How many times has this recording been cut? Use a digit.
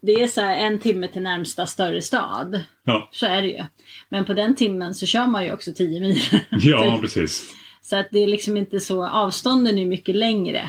0